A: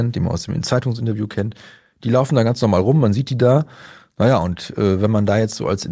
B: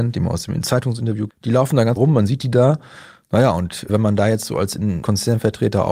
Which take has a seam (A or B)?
B